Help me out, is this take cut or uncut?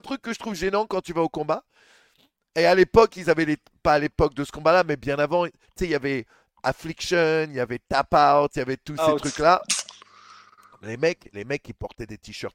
cut